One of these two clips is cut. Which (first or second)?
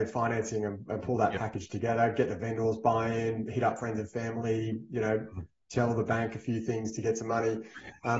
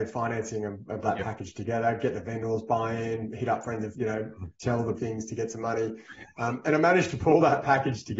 second